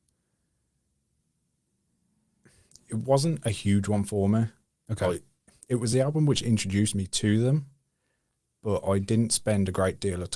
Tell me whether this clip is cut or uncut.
uncut